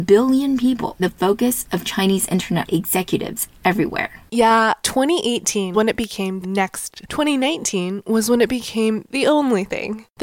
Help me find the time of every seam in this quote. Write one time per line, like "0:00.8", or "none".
0:01.0
0:02.7
0:03.5
0:04.8
0:05.7
0:06.4
0:07.1
0:09.1